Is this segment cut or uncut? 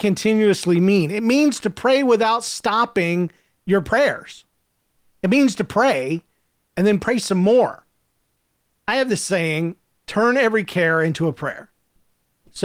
uncut